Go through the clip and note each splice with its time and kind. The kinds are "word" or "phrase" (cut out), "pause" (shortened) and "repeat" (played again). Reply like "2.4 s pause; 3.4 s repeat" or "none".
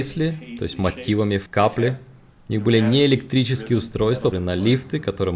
1.5 s word; 4.3 s word